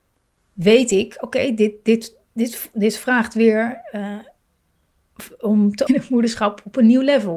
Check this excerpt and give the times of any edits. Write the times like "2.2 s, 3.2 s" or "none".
5.9 s